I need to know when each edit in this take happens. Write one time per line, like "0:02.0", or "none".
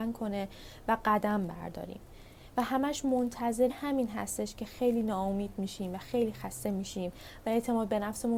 0:03.7